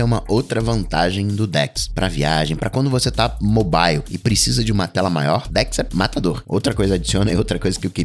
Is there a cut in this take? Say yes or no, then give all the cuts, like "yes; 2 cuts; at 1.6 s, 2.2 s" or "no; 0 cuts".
no; 0 cuts